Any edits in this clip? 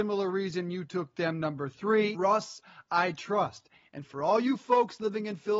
yes; 1 cut; at 2.1 s

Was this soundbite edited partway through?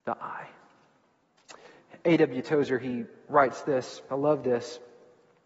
no; 0 cuts

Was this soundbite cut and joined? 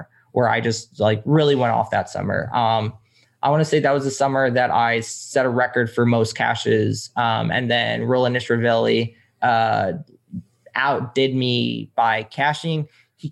no; 0 cuts

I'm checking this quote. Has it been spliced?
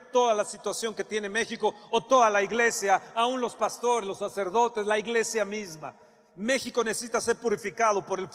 no; 0 cuts

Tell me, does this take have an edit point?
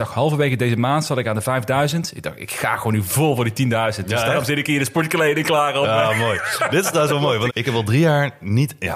yes; 1 cut; at 7.5 s

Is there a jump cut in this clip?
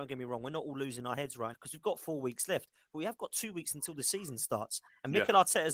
yes; 1 cut; at 1.5 s

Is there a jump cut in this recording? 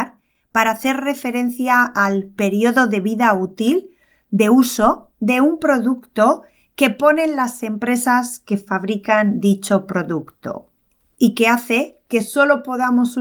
no; 0 cuts

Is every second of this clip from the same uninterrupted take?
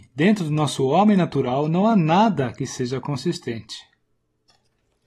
yes; 0 cuts

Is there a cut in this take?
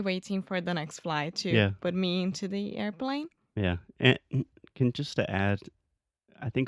no; 0 cuts

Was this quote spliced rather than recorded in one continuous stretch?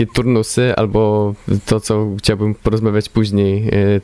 no; 0 cuts

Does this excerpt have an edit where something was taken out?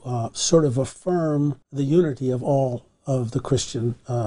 yes; 1 cut; at 1.6 s

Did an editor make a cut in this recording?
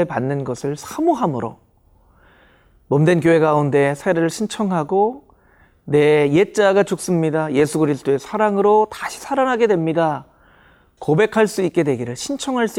no; 0 cuts

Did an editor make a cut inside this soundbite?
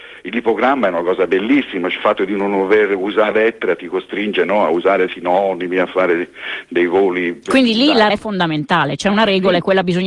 yes; 4 cuts; at 2.0 s, 3.3 s, 5.1 s, 8.1 s

